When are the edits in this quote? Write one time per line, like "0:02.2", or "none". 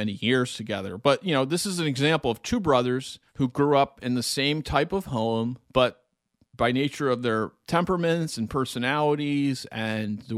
0:03.3
0:05.6